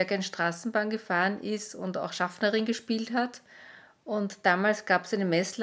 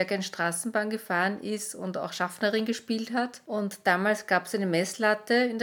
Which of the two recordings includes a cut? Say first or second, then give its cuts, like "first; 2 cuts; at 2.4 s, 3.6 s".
second; 1 cut; at 3.4 s